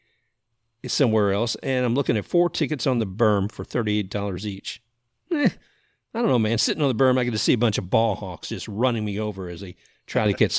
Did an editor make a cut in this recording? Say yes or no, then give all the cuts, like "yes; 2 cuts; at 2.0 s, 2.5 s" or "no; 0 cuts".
no; 0 cuts